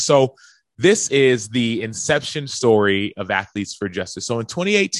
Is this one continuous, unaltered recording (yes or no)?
yes